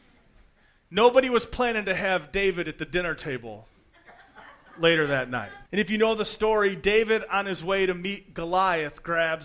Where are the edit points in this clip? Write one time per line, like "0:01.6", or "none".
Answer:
0:05.7